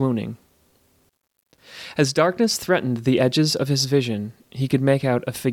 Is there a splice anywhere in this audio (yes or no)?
no